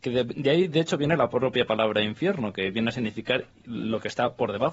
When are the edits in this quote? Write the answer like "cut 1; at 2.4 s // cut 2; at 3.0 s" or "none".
none